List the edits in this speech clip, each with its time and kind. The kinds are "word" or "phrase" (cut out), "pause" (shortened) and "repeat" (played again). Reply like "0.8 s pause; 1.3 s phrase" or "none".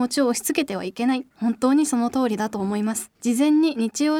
1.3 s pause; 3.1 s pause